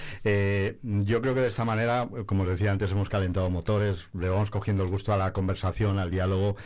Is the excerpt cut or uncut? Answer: uncut